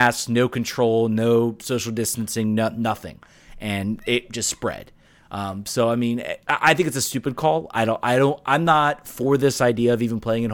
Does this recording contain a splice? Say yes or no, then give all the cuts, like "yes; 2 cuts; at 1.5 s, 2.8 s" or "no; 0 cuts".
yes; 1 cut; at 6.4 s